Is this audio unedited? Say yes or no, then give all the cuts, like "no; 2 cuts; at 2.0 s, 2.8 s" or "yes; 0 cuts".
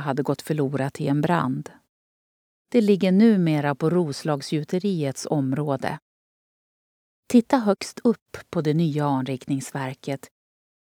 yes; 0 cuts